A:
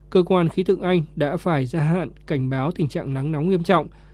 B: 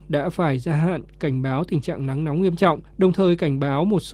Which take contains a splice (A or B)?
B